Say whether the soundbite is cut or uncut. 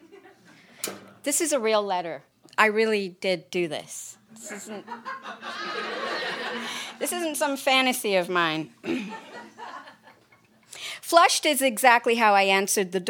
cut